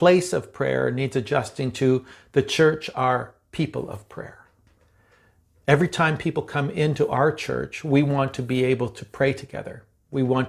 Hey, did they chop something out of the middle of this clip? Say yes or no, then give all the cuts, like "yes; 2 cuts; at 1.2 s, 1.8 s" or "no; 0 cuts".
no; 0 cuts